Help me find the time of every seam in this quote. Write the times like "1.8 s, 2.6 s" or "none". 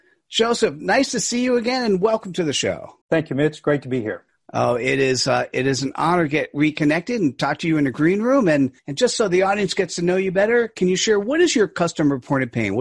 3.0 s, 4.3 s, 8.8 s